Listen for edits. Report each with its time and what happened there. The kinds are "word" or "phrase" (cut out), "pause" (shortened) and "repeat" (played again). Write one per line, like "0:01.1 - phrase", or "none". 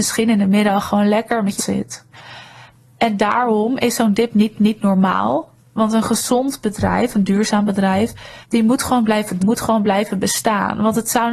0:01.6 - phrase
0:04.5 - repeat
0:08.4 - pause
0:09.4 - word